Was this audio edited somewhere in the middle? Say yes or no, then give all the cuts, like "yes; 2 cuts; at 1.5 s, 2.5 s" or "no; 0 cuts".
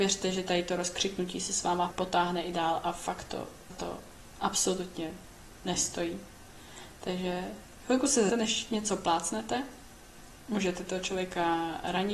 yes; 3 cuts; at 1.9 s, 3.7 s, 8.3 s